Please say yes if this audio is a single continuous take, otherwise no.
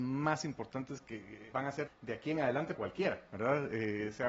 no